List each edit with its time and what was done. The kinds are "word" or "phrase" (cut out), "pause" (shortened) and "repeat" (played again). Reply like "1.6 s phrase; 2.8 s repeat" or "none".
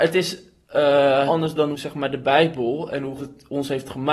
1.3 s word; 1.7 s word; 3.2 s word

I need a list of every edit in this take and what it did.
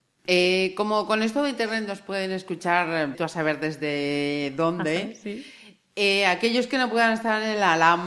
3.1 s word

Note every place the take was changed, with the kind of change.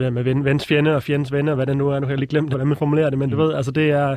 2.5 s word

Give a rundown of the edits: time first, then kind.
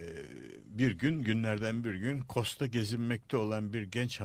none

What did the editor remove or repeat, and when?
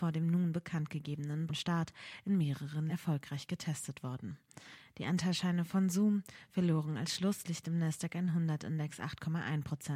1.5 s word; 2.9 s word

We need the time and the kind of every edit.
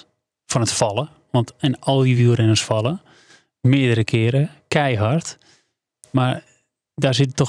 none

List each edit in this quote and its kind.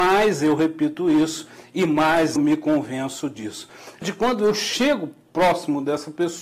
2.4 s word; 4.0 s word

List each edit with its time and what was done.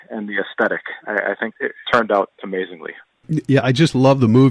1.5 s word; 1.8 s word

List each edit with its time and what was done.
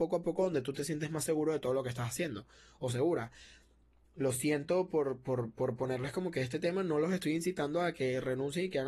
none

